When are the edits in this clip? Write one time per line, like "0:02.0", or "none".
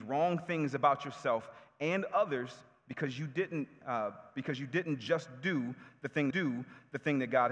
0:06.3